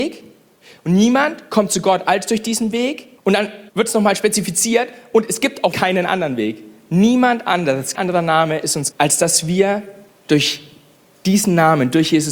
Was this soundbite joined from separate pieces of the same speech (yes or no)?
yes